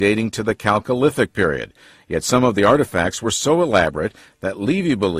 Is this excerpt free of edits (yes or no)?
yes